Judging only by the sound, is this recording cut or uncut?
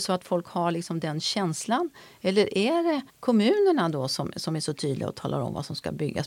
cut